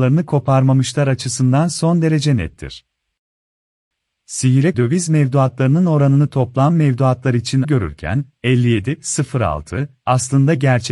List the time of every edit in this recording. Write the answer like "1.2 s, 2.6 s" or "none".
4.7 s, 7.6 s